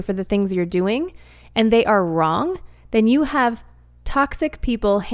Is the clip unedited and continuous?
yes; 0 cuts

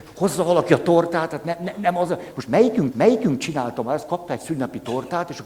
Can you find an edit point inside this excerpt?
yes; 1 cut; at 2.9 s

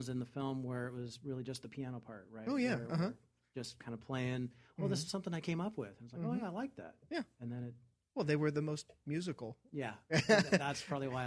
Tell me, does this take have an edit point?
no; 0 cuts

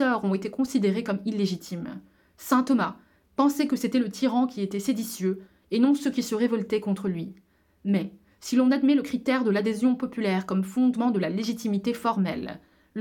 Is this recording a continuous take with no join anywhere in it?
yes; 0 cuts

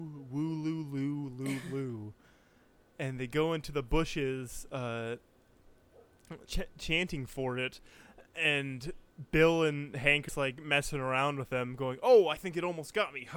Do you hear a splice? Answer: yes; 2 cuts; at 6.5 s, 10.3 s

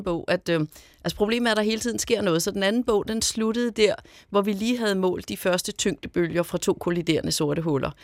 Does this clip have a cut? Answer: no; 0 cuts

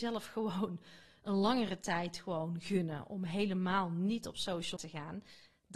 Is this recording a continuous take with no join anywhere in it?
no; 1 cut; at 4.8 s

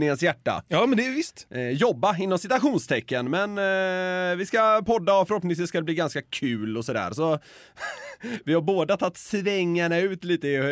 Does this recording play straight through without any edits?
yes; 0 cuts

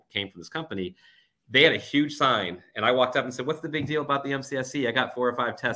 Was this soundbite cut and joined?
no; 0 cuts

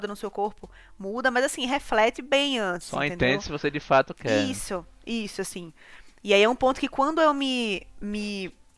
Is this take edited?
no; 0 cuts

